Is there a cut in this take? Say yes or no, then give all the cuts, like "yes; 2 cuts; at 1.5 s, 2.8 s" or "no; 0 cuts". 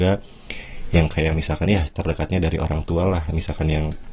no; 0 cuts